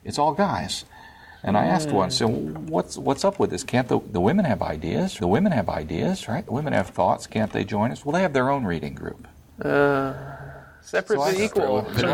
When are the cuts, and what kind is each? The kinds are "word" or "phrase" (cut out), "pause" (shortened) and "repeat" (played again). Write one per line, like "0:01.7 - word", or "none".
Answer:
0:05.2 - repeat